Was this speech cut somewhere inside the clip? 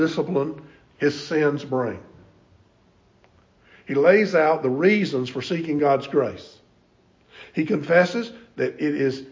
no; 0 cuts

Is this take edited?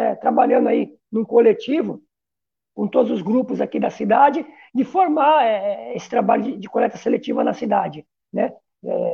no; 0 cuts

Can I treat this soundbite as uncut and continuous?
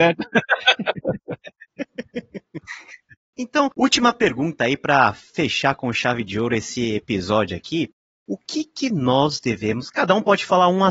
yes; 0 cuts

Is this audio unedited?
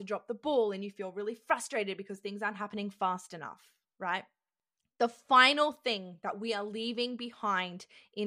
yes; 0 cuts

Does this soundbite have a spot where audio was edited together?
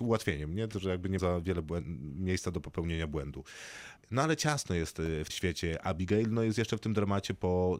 yes; 2 cuts; at 1.2 s, 5.3 s

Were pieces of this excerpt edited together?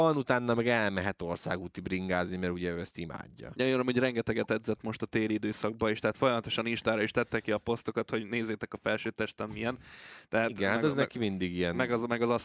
no; 0 cuts

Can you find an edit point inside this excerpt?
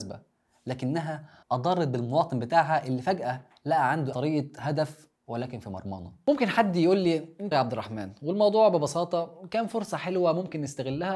yes; 3 cuts; at 1.4 s, 4.1 s, 7.5 s

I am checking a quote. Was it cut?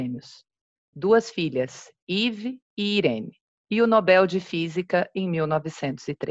no; 0 cuts

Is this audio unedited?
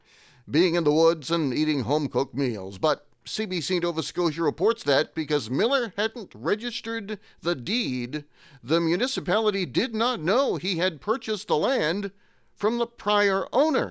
yes; 0 cuts

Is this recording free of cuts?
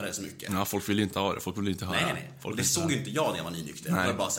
no; 1 cut; at 1.1 s

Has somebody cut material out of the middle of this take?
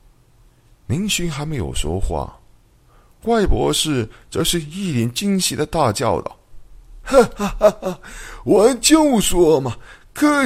no; 0 cuts

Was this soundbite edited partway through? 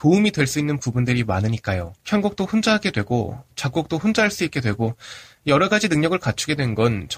yes; 1 cut; at 2.0 s

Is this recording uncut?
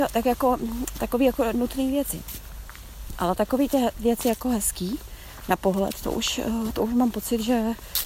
yes; 0 cuts

